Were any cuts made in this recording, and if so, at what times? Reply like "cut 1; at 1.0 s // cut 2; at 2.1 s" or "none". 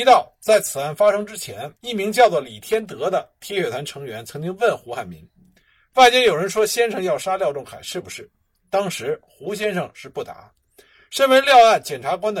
cut 1; at 1.8 s